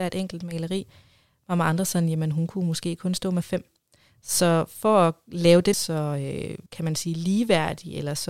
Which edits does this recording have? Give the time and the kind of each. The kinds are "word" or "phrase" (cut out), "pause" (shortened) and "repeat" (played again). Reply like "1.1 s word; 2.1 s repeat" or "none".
5.7 s phrase; 6.7 s pause